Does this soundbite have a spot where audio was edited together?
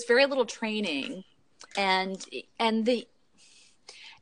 yes; 1 cut; at 1.7 s

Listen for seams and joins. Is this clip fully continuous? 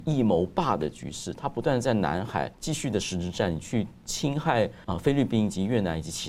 no; 2 cuts; at 2.5 s, 4.8 s

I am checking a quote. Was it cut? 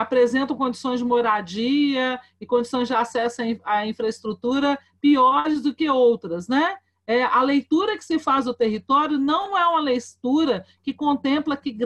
no; 0 cuts

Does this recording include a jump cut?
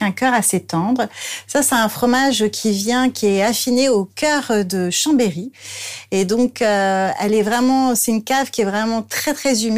no; 0 cuts

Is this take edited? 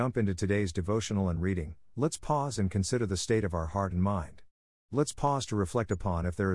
no; 0 cuts

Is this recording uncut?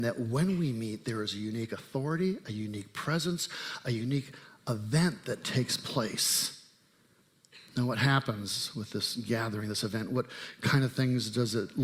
yes; 0 cuts

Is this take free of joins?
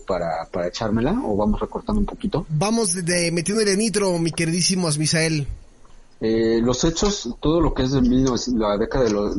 yes; 0 cuts

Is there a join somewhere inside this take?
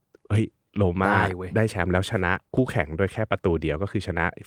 yes; 1 cut; at 2.5 s

